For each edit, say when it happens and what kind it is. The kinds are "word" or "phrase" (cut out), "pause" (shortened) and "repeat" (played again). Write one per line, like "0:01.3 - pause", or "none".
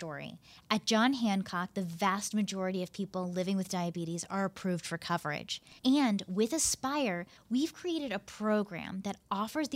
0:05.8 - pause